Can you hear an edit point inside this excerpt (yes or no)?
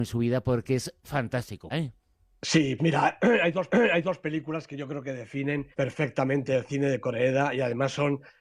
yes